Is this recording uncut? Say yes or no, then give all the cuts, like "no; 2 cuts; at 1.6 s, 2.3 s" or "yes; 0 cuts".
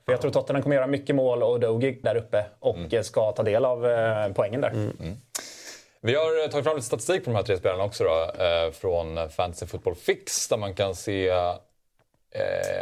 no; 1 cut; at 2.0 s